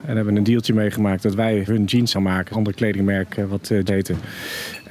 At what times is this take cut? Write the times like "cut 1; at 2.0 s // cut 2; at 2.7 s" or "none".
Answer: cut 1; at 1.7 s // cut 2; at 2.1 s // cut 3; at 2.5 s // cut 4; at 3.9 s